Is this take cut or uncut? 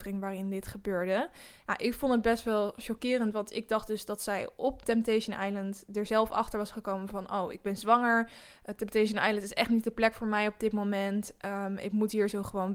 uncut